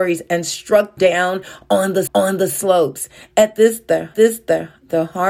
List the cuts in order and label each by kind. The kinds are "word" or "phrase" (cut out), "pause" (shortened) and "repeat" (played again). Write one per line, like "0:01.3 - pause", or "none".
0:01.0 - word
0:02.1 - repeat
0:04.1 - repeat